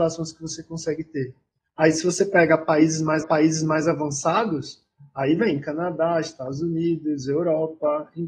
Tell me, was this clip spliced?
yes; 1 cut; at 3.2 s

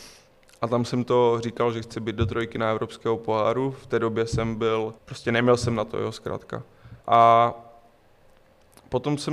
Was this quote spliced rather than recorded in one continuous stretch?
yes; 2 cuts; at 5.0 s, 7.0 s

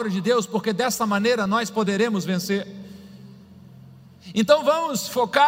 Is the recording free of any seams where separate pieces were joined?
yes; 0 cuts

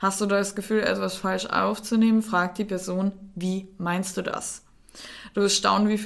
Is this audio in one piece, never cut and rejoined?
yes; 0 cuts

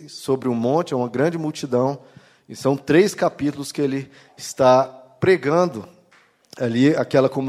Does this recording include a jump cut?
no; 0 cuts

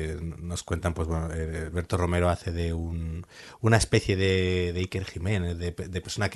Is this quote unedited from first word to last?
yes; 0 cuts

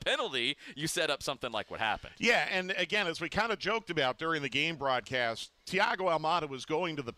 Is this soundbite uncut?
yes; 0 cuts

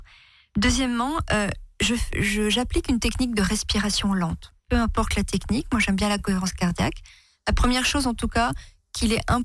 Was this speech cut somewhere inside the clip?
yes; 1 cut; at 4.6 s

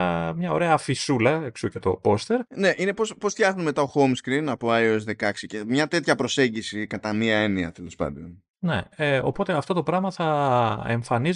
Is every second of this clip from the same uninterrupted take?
no; 2 cuts; at 2.5 s, 8.5 s

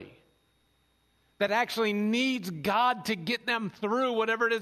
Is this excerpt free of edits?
yes; 0 cuts

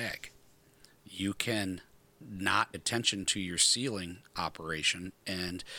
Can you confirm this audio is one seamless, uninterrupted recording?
no; 1 cut; at 2.7 s

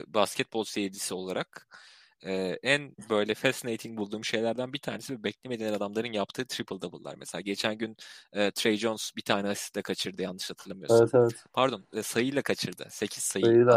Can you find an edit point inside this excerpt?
no; 0 cuts

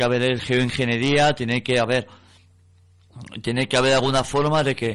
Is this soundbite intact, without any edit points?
yes; 0 cuts

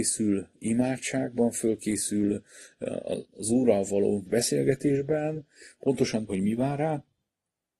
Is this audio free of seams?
no; 3 cuts; at 3.3 s, 4.3 s, 6.3 s

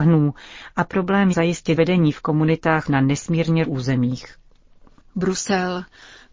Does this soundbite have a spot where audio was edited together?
yes; 4 cuts; at 1.3 s, 1.8 s, 2.8 s, 3.6 s

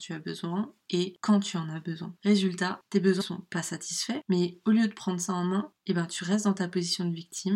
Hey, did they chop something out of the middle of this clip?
yes; 1 cut; at 3.2 s

